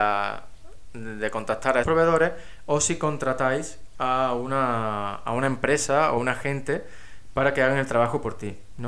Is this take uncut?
no; 2 cuts; at 1.8 s, 6.2 s

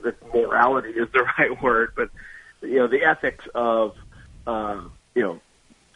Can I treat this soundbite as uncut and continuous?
yes; 0 cuts

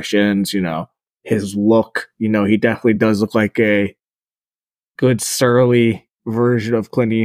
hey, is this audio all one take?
yes; 0 cuts

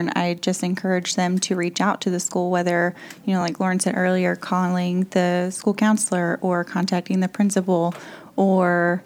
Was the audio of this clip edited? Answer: no; 0 cuts

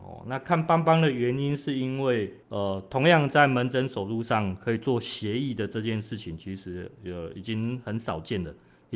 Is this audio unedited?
no; 1 cut; at 2.4 s

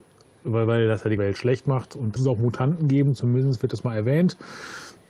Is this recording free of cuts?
no; 2 cuts; at 1.2 s, 2.2 s

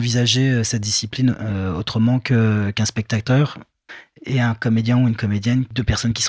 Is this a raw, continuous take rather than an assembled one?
yes; 0 cuts

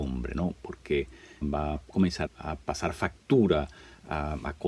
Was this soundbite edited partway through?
yes; 3 cuts; at 1.4 s, 1.8 s, 2.3 s

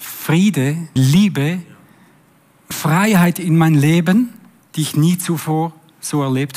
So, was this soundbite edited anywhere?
yes; 3 cuts; at 1.0 s, 2.7 s, 4.6 s

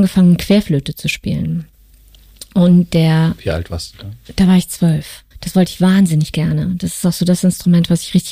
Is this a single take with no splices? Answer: no; 1 cut; at 5.3 s

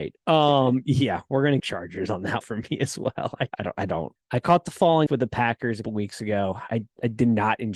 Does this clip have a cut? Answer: yes; 6 cuts; at 1.6 s, 2.4 s, 3.5 s, 4.2 s, 5.1 s, 5.8 s

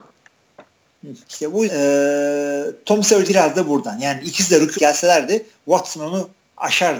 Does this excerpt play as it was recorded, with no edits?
no; 4 cuts; at 1.2 s, 1.7 s, 3.3 s, 4.7 s

